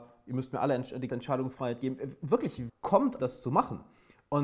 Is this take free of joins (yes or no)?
no